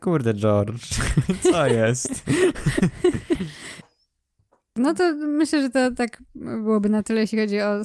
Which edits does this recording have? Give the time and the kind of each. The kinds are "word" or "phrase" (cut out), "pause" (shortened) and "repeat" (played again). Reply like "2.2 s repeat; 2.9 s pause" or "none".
none